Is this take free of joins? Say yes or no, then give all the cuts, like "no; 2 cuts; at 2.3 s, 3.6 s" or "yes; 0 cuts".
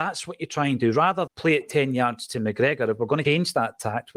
no; 2 cuts; at 1.3 s, 3.2 s